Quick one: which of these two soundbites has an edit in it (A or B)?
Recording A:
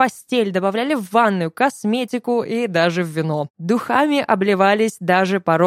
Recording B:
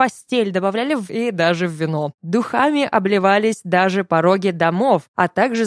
B